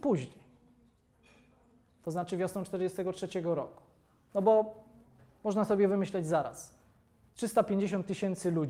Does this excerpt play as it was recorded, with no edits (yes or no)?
yes